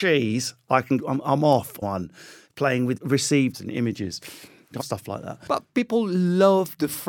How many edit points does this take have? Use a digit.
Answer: 5